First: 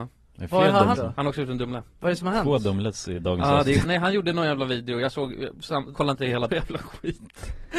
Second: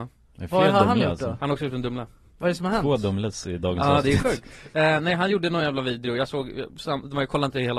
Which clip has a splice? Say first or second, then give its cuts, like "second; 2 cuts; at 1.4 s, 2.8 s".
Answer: first; 5 cuts; at 0.9 s, 1.9 s, 3.8 s, 5.9 s, 6.5 s